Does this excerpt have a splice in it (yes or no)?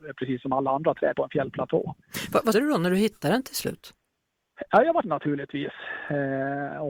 yes